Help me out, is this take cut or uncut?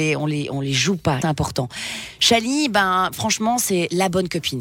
cut